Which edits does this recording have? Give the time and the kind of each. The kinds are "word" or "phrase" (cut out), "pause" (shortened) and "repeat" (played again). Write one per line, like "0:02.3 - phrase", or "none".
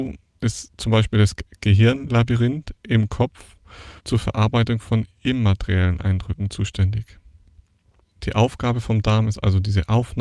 0:04.0 - pause